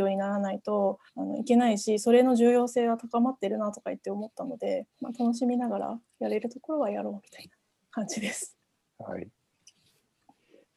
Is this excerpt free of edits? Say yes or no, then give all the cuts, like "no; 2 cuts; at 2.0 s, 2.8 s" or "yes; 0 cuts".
no; 2 cuts; at 1.1 s, 4.9 s